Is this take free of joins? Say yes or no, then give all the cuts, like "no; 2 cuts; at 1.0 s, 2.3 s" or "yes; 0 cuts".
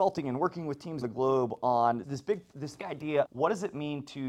no; 4 cuts; at 1.0 s, 2.0 s, 2.8 s, 3.2 s